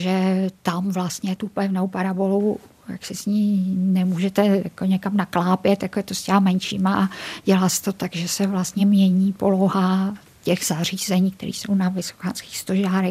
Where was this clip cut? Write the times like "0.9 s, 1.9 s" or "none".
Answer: none